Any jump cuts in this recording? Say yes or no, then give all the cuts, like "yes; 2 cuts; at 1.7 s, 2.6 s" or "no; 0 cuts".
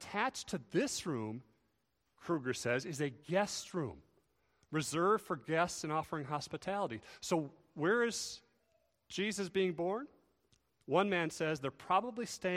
no; 0 cuts